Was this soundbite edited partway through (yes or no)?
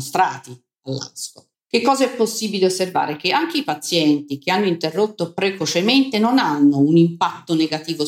yes